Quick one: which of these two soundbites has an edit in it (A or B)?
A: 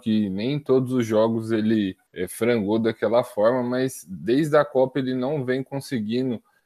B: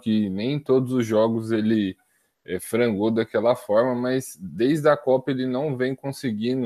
A